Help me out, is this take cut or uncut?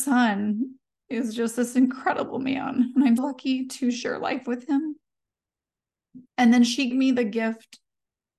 cut